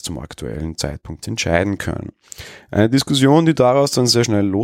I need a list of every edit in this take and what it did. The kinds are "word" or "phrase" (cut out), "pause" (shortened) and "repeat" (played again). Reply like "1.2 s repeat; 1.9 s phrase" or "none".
1.2 s word

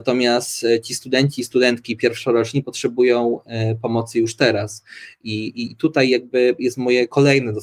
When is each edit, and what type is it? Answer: none

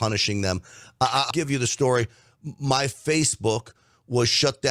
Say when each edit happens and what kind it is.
1.3 s word

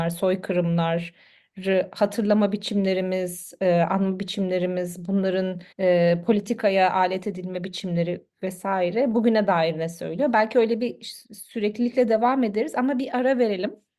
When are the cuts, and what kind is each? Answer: 5.7 s pause; 11.2 s pause

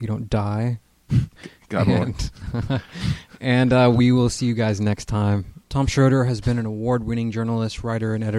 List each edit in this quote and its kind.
5.6 s pause

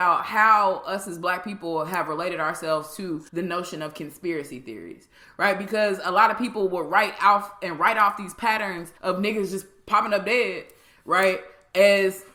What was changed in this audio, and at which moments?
3.3 s pause; 9.0 s pause

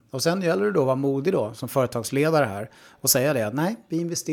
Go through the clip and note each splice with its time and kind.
none

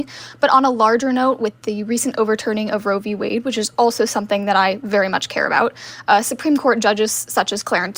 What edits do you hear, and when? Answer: none

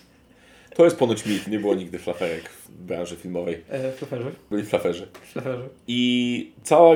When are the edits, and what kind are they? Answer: 1.5 s word; 2.7 s word

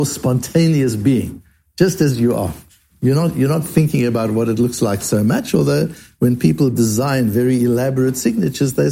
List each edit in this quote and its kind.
none

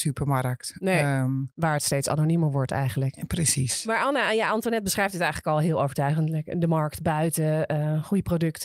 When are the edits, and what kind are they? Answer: none

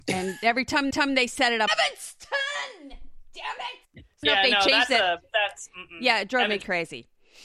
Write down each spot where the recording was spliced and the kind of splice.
0.9 s repeat; 1.7 s word; 3.8 s pause; 4.2 s phrase

